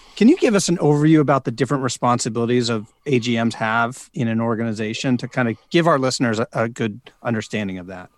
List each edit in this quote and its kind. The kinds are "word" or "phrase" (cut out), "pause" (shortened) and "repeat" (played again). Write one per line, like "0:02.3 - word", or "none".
0:04.1 - word